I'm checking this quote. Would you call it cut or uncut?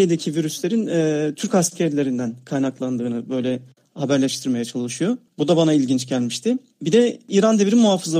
uncut